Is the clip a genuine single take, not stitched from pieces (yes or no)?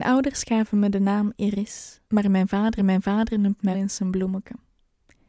no